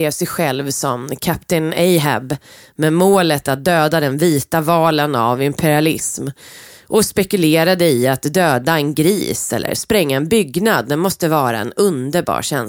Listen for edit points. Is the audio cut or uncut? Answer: uncut